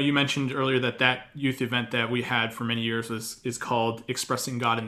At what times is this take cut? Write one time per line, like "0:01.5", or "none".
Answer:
none